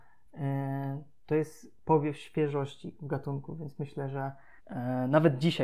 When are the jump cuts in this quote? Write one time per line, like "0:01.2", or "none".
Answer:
0:04.6